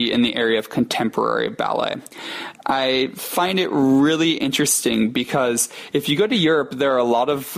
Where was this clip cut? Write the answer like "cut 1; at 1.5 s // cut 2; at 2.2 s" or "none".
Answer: none